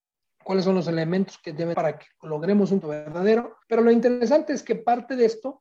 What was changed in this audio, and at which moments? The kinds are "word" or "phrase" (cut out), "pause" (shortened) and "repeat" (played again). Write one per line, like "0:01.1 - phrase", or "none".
0:01.7 - phrase
0:02.8 - word
0:03.6 - pause